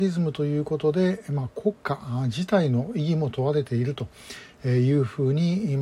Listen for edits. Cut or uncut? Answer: cut